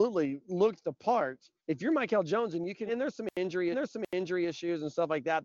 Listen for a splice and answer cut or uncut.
cut